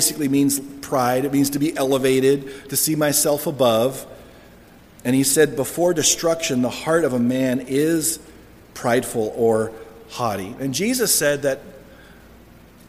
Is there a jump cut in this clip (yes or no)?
no